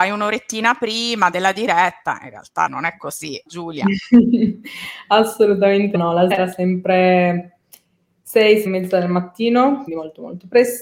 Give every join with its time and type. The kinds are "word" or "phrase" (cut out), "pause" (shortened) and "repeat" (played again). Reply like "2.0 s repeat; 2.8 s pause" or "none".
1.3 s word; 2.7 s word; 3.5 s word; 5.9 s word; 6.3 s word; 8.7 s word; 9.9 s word